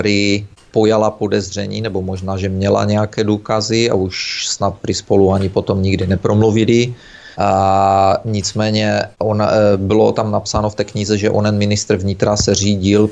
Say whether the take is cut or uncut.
cut